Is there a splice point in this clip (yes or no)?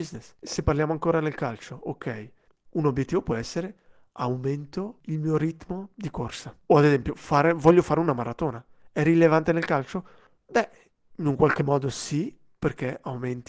yes